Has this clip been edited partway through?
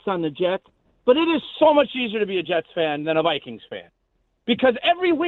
no; 0 cuts

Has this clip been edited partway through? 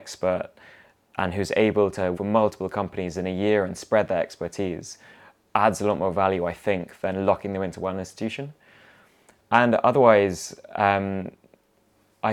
yes; 1 cut; at 2.1 s

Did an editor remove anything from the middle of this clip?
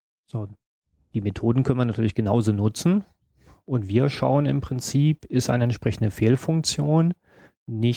no; 0 cuts

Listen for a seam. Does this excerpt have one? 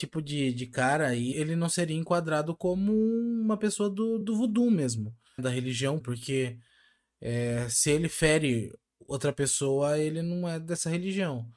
yes; 4 cuts; at 1.3 s, 4.2 s, 5.4 s, 6.0 s

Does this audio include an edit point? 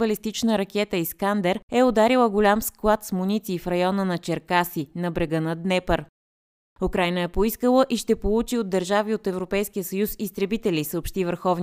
no; 0 cuts

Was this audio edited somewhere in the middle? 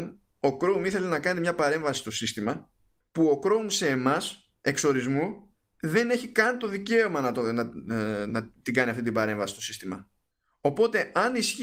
yes; 3 cuts; at 3.0 s, 4.6 s, 10.3 s

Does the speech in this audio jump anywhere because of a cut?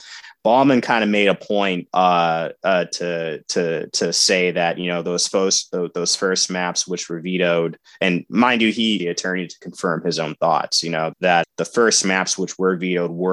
yes; 4 cuts; at 1.9 s, 9.0 s, 11.1 s, 11.4 s

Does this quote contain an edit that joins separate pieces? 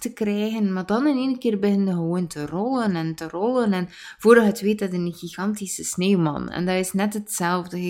no; 0 cuts

